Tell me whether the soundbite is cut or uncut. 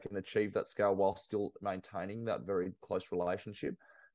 uncut